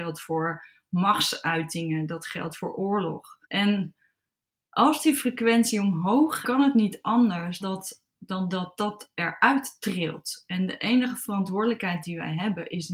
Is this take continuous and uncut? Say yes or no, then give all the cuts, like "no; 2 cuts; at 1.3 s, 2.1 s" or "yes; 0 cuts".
no; 3 cuts; at 3.4 s, 6.4 s, 7.6 s